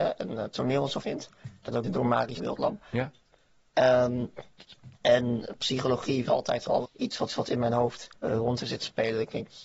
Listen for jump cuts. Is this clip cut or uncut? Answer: cut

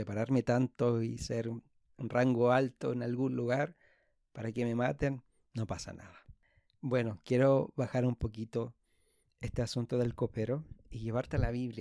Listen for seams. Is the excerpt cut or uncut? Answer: uncut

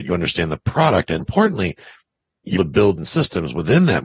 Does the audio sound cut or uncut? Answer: cut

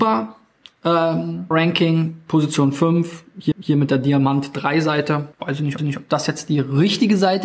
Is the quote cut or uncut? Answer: cut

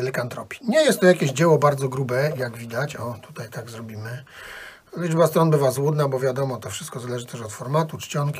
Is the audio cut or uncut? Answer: uncut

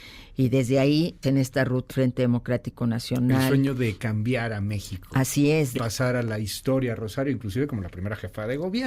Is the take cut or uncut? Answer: cut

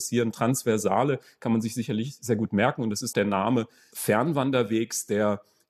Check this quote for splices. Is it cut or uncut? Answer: cut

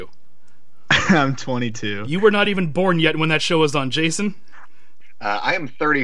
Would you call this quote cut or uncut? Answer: uncut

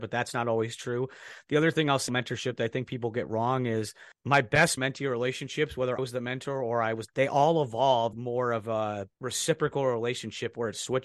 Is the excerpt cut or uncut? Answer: cut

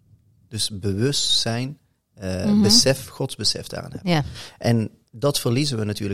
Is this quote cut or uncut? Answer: uncut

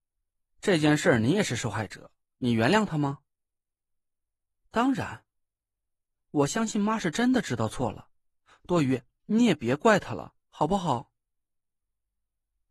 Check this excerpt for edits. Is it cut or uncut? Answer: uncut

